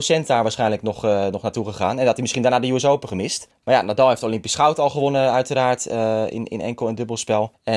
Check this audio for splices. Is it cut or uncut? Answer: uncut